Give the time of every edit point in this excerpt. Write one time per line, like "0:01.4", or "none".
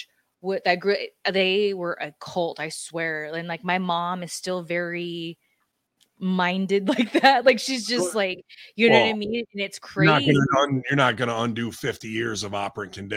none